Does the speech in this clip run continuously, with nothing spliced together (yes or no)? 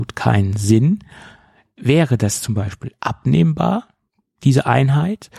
yes